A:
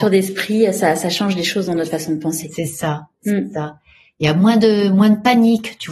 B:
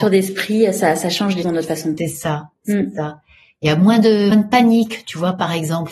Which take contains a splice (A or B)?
B